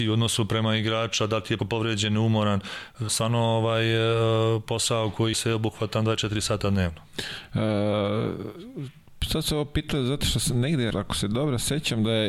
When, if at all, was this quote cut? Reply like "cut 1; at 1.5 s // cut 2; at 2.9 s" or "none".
cut 1; at 1.6 s // cut 2; at 3.1 s // cut 3; at 5.3 s // cut 4; at 10.9 s